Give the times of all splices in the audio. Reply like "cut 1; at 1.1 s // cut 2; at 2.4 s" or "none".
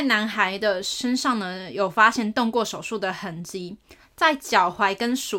none